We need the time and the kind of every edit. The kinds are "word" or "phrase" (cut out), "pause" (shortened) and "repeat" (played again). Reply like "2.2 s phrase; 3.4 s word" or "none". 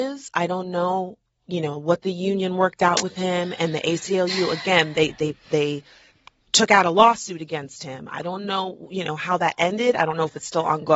none